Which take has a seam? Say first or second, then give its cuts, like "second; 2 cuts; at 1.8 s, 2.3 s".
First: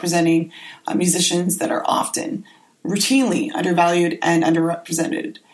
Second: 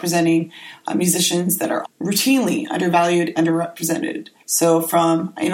second; 3 cuts; at 1.8 s, 3.4 s, 4.4 s